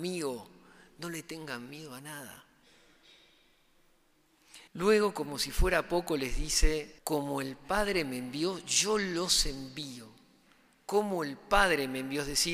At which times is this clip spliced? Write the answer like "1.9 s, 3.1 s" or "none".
4.7 s, 7.0 s

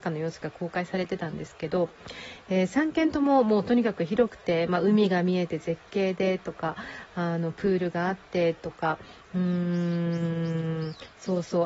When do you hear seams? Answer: none

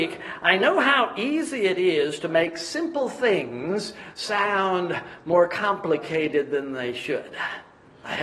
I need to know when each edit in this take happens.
none

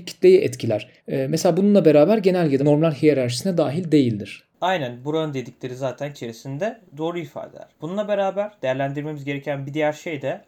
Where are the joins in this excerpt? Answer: 1.0 s, 2.6 s, 4.5 s, 6.1 s, 7.7 s

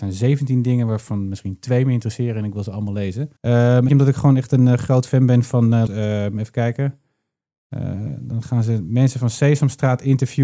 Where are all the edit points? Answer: 3.4 s, 3.9 s, 5.9 s

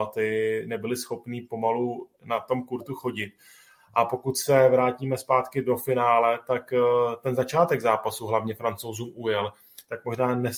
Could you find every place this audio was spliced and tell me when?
none

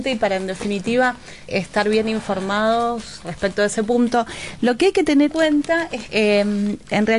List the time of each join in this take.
1.5 s, 3.2 s, 5.3 s, 6.1 s

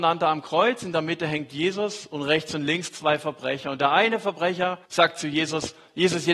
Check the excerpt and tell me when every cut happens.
4.8 s

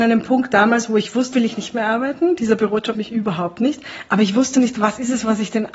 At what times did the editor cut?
1.3 s, 2.9 s

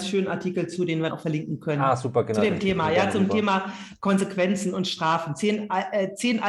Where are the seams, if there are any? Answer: 1.1 s

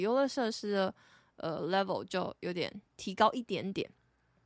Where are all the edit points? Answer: 2.8 s

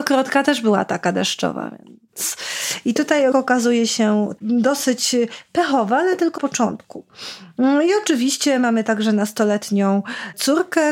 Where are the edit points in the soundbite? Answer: 3.3 s, 4.4 s, 6.4 s

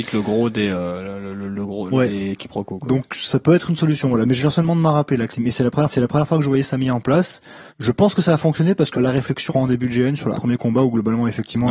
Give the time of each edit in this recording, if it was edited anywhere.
1.9 s, 5.3 s, 5.9 s, 7.7 s, 8.9 s, 9.5 s, 10.3 s

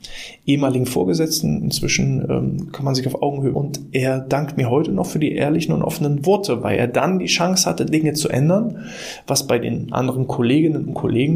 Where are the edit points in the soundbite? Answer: 3.5 s

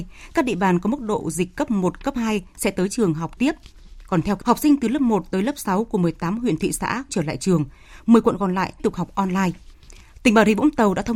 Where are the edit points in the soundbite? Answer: 3.4 s, 4.4 s, 7.1 s, 8.8 s

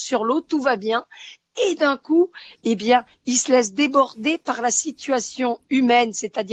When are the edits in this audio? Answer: none

